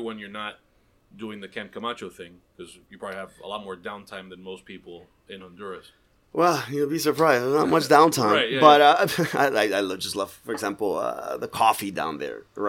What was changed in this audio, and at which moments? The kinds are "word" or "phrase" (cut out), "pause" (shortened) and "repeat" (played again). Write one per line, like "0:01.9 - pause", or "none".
none